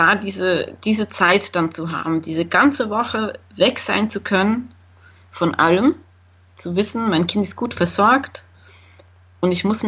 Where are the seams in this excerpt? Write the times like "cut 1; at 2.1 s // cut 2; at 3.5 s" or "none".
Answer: none